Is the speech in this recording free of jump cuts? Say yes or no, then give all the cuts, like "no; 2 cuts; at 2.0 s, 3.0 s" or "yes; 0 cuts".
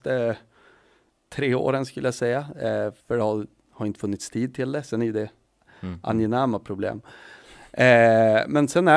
no; 1 cut; at 3.0 s